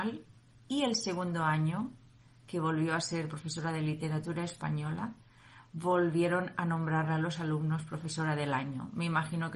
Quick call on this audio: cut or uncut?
uncut